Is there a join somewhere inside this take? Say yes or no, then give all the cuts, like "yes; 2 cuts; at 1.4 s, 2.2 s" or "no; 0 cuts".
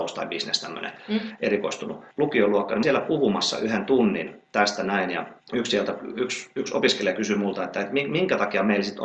yes; 3 cuts; at 2.1 s, 2.8 s, 5.4 s